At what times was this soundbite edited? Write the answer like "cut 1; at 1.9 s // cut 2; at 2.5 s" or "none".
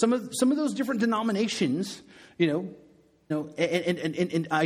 cut 1; at 3.3 s

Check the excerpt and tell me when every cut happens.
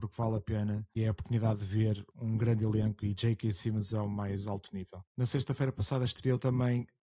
cut 1; at 1.0 s

